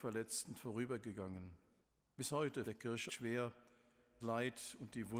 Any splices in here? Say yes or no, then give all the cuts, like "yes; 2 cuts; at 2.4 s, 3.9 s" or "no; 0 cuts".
yes; 4 cuts; at 1.8 s, 2.6 s, 3.1 s, 4.2 s